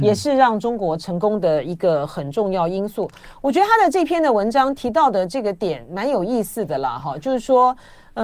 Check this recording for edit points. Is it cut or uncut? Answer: uncut